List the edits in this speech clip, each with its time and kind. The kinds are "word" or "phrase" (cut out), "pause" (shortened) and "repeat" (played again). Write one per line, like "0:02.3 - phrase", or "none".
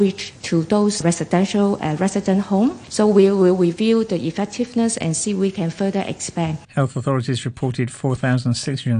0:06.6 - pause